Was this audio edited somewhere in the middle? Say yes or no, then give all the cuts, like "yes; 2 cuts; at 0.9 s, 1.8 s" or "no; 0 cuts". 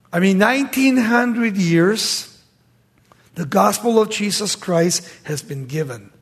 no; 0 cuts